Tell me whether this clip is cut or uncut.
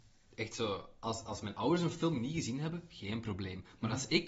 uncut